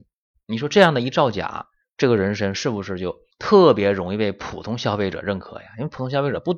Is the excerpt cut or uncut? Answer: cut